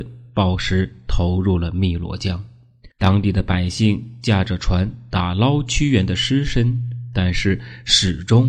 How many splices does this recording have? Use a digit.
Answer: 1